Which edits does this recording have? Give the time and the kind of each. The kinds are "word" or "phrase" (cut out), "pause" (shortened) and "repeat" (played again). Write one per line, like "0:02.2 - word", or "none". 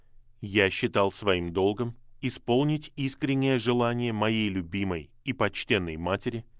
none